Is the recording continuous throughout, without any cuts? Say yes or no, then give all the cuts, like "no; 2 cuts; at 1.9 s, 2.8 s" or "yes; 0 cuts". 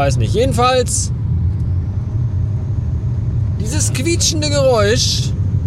yes; 0 cuts